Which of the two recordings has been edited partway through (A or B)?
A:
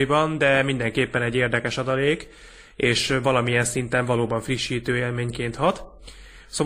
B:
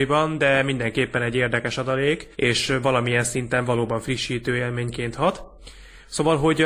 B